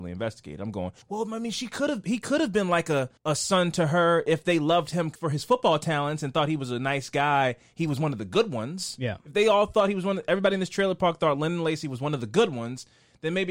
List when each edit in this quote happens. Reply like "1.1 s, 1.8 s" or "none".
1.0 s, 3.2 s, 5.2 s